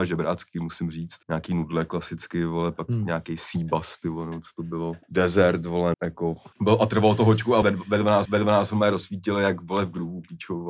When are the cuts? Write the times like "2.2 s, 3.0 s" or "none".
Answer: 1.2 s, 5.0 s, 5.9 s, 6.5 s, 7.6 s, 8.3 s